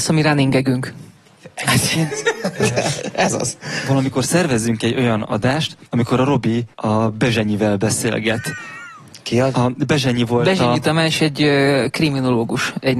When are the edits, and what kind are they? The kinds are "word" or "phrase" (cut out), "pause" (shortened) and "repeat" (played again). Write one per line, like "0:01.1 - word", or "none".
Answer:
0:05.9 - pause
0:06.7 - pause